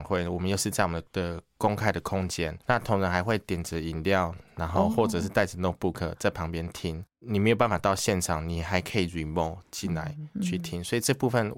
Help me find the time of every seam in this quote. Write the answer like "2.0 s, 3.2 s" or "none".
1.1 s, 2.6 s

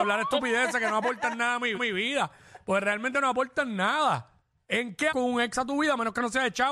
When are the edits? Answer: 1.7 s, 4.5 s, 5.1 s

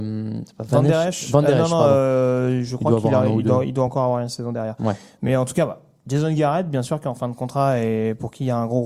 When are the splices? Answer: none

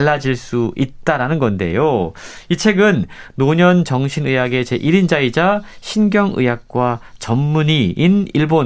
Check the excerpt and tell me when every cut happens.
none

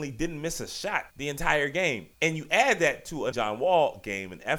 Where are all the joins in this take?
1.1 s, 2.1 s, 3.3 s

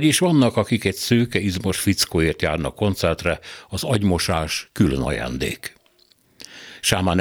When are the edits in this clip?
none

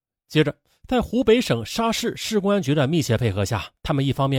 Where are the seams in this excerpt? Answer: none

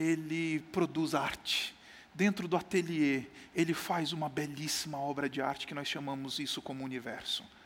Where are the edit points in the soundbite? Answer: none

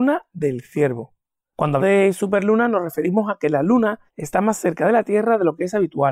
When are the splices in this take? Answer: 1.8 s, 4.1 s

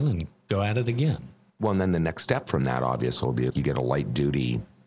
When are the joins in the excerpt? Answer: 3.5 s

